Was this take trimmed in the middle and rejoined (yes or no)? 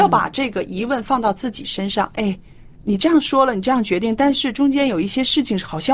yes